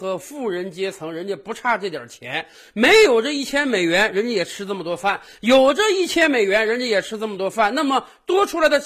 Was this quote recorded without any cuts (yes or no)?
yes